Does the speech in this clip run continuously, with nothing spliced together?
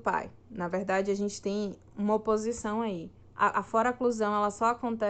no; 1 cut; at 3.2 s

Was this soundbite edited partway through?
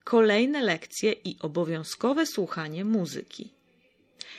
no; 0 cuts

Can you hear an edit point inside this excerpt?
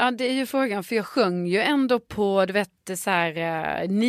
no; 0 cuts

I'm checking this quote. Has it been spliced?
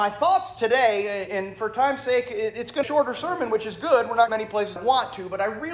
yes; 4 cuts; at 1.3 s, 2.8 s, 4.3 s, 4.8 s

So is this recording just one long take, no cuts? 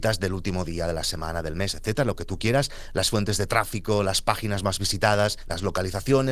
yes; 0 cuts

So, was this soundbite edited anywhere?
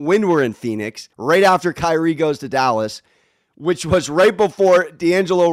yes; 1 cut; at 1.1 s

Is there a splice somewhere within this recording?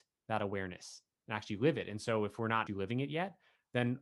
yes; 1 cut; at 2.7 s

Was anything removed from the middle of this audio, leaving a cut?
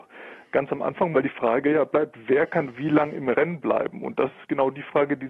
yes; 1 cut; at 1.1 s

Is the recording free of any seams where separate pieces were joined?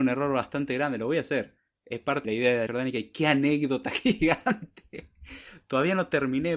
no; 2 cuts; at 2.2 s, 2.7 s

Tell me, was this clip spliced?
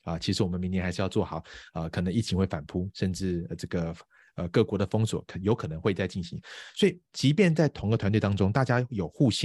no; 0 cuts

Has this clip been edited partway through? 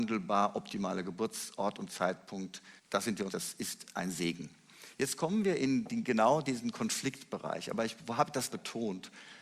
yes; 3 cuts; at 2.8 s, 3.3 s, 8.5 s

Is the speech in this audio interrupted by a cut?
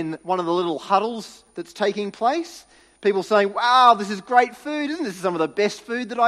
no; 0 cuts

